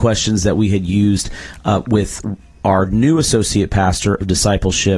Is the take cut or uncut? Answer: uncut